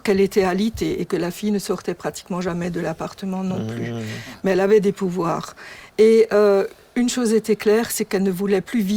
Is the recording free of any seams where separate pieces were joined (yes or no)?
yes